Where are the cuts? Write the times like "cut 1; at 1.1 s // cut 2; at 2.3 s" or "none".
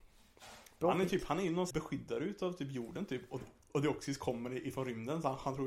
cut 1; at 1.7 s // cut 2; at 3.7 s

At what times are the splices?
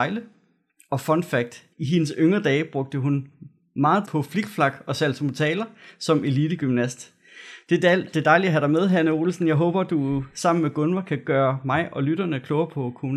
cut 1; at 1.7 s // cut 2; at 4.0 s

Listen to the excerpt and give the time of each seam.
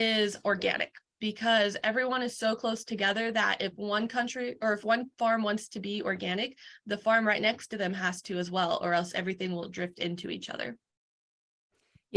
none

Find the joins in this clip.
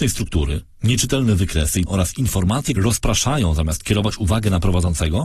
cut 1; at 1.9 s // cut 2; at 2.8 s

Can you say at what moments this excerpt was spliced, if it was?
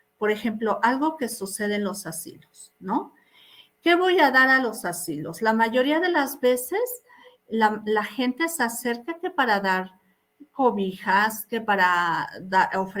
none

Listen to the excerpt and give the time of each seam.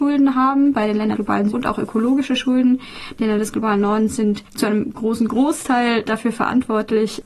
cut 1; at 1.1 s // cut 2; at 1.5 s // cut 3; at 4.9 s

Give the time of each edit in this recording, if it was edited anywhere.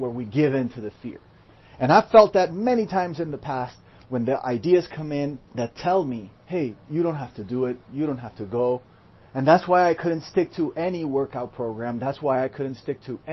cut 1; at 6.4 s

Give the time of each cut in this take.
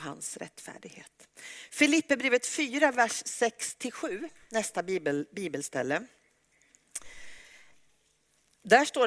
none

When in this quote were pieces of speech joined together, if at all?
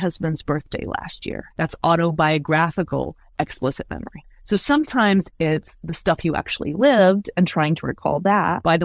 cut 1; at 1.5 s

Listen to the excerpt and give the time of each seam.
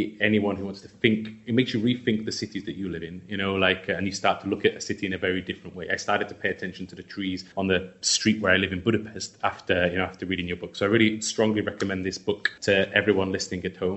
cut 1; at 7.5 s // cut 2; at 12.6 s

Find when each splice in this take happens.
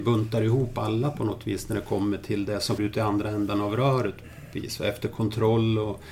cut 1; at 2.8 s // cut 2; at 4.5 s

